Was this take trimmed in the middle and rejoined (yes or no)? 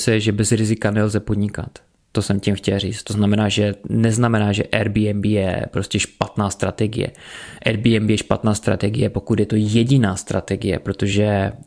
no